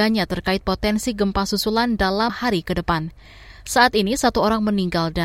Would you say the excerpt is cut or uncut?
cut